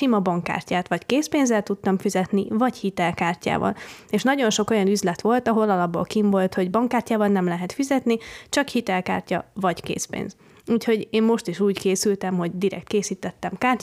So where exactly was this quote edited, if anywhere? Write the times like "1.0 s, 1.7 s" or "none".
none